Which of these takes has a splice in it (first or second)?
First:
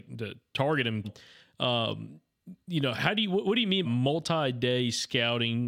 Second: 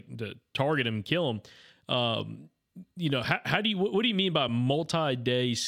first